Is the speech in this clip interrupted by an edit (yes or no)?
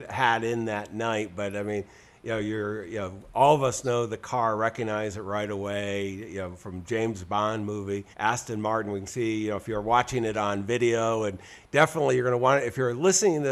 yes